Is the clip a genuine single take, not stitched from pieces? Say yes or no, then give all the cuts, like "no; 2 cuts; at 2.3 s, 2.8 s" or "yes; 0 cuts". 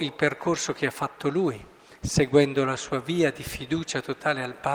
yes; 0 cuts